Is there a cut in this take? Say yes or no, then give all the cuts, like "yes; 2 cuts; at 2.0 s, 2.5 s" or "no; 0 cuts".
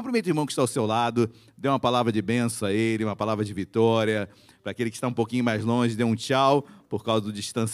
no; 0 cuts